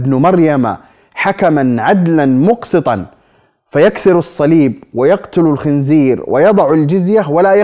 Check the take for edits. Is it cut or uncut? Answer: uncut